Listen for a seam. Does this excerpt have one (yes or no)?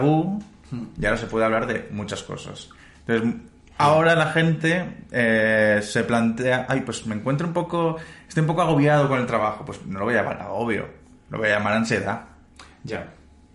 no